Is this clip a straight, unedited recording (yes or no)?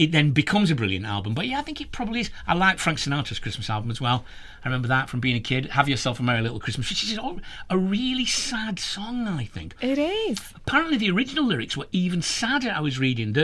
yes